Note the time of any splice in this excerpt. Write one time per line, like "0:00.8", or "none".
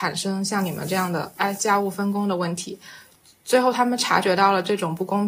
none